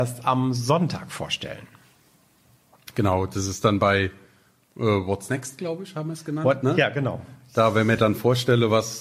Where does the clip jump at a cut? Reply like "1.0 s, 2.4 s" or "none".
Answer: none